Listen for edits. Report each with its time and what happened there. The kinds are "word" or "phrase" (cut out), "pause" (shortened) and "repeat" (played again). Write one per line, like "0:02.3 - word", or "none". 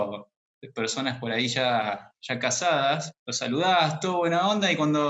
0:03.2 - pause